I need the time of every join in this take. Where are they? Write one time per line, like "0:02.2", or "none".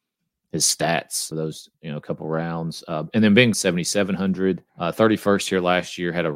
0:01.3
0:01.7
0:03.5
0:04.7